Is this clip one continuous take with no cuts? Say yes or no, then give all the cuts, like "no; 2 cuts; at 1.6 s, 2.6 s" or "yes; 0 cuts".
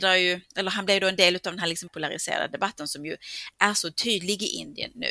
yes; 0 cuts